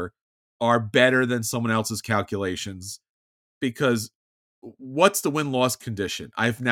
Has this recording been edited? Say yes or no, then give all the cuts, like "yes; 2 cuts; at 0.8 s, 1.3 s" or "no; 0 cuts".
no; 0 cuts